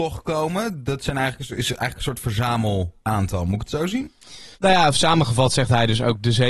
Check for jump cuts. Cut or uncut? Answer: cut